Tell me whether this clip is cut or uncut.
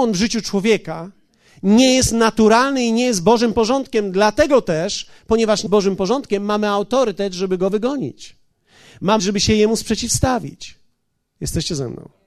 cut